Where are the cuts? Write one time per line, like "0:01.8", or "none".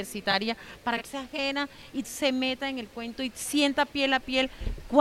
0:01.0
0:02.0